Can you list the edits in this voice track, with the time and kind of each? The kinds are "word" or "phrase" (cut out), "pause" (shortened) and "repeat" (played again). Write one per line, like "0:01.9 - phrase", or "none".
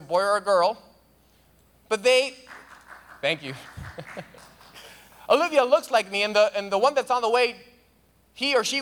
none